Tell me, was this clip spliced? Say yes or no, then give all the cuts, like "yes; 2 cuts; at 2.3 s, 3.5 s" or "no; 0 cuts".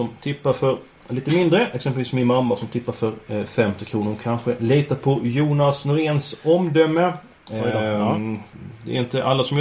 no; 0 cuts